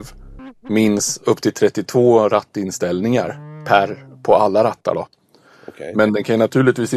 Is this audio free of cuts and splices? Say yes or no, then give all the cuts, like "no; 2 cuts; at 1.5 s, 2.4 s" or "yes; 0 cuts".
yes; 0 cuts